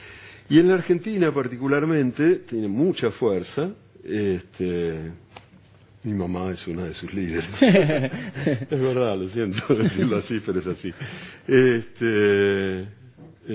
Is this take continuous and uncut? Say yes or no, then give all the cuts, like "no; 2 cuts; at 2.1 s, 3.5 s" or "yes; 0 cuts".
yes; 0 cuts